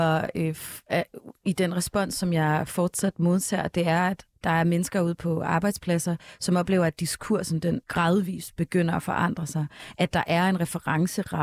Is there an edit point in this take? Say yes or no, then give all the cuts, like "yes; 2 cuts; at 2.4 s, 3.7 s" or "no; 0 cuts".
yes; 1 cut; at 7.8 s